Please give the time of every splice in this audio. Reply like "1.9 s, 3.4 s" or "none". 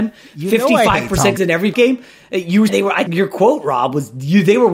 1.4 s, 1.7 s, 2.7 s, 3.1 s